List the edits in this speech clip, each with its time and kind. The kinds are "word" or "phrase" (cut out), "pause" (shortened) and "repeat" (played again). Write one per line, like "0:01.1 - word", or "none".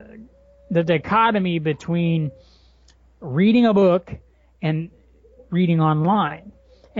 none